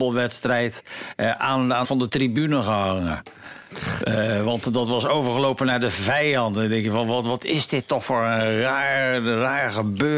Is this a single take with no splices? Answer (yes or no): no